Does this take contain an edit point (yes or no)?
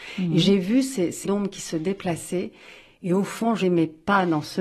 yes